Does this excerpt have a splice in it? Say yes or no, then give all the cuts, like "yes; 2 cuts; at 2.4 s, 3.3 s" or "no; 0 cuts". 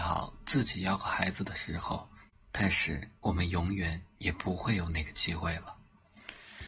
yes; 2 cuts; at 2.3 s, 3.2 s